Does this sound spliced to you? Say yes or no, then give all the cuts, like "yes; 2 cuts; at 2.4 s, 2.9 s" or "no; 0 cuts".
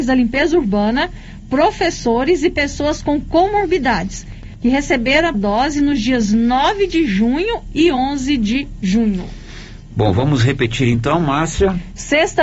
yes; 1 cut; at 5.3 s